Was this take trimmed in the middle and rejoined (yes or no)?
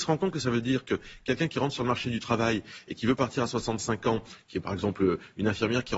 no